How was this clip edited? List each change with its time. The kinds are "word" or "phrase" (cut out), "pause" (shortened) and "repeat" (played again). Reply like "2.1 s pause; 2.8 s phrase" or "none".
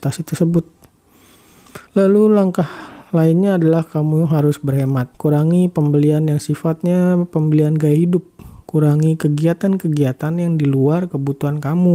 1.9 s pause; 5.1 s pause